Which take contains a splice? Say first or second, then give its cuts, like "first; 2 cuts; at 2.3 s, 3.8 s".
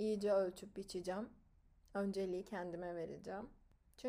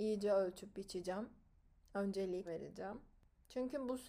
second; 1 cut; at 2.5 s